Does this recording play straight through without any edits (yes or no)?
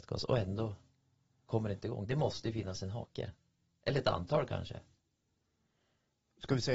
yes